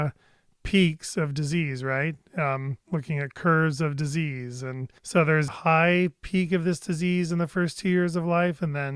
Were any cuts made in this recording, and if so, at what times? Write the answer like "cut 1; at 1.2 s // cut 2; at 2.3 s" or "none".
cut 1; at 2.8 s // cut 2; at 5.0 s // cut 3; at 5.5 s

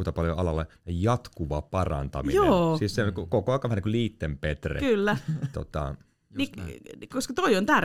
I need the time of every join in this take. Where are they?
cut 1; at 5.5 s

